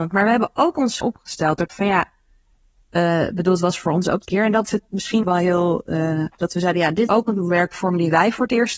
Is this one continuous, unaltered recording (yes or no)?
no